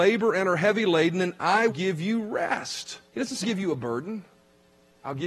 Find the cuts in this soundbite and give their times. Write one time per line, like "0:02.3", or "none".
0:01.7
0:03.1
0:03.4